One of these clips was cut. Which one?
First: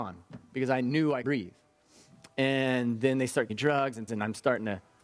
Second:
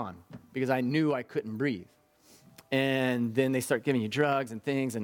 first; 3 cuts; at 1.2 s, 3.5 s, 4.1 s

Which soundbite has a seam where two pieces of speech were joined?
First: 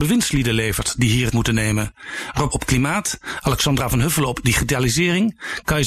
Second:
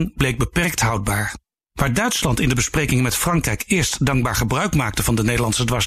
first; 2 cuts; at 1.3 s, 2.5 s

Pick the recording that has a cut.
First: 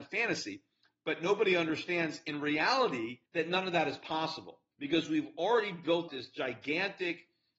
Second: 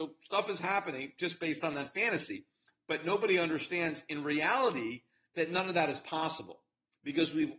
first; 3 cuts; at 3.3 s, 4.7 s, 6.1 s

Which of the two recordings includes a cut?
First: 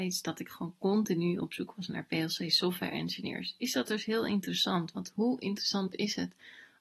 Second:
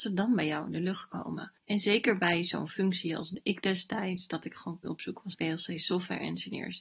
second; 3 cuts; at 1.6 s, 4.8 s, 5.3 s

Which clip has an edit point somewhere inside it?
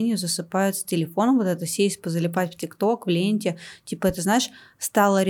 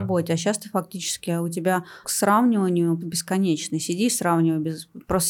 second; 2 cuts; at 2.0 s, 3.0 s

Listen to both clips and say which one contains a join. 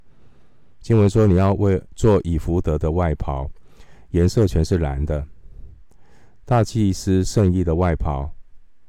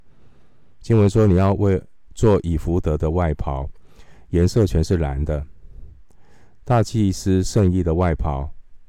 first; 1 cut; at 1.9 s

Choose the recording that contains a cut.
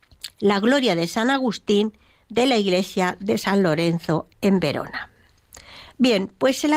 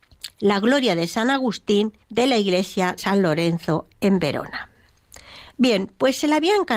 second; 2 cuts; at 2.0 s, 3.0 s

